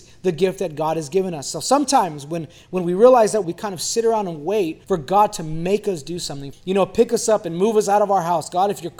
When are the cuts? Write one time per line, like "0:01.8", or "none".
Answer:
0:03.4
0:04.8
0:06.5